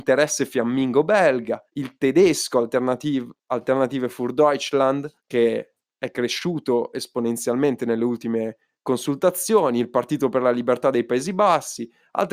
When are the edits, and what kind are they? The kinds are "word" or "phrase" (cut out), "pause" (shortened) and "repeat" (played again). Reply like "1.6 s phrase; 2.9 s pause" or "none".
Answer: 1.7 s pause; 5.2 s pause; 8.7 s pause